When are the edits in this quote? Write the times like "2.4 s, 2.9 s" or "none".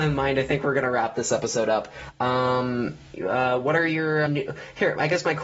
4.3 s